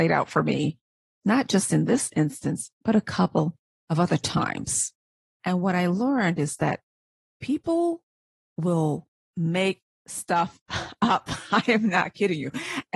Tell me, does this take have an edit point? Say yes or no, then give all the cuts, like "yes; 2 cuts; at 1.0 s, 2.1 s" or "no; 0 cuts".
no; 0 cuts